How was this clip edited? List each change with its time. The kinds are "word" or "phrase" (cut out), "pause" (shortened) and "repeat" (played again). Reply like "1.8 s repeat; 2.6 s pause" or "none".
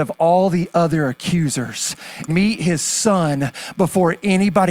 2.3 s word